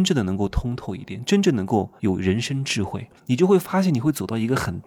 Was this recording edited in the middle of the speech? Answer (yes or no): yes